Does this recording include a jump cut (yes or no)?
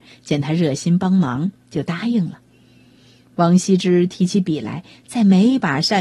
no